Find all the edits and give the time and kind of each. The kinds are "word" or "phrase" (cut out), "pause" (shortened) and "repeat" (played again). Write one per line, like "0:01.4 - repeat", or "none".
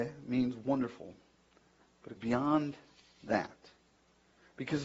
0:02.2 - word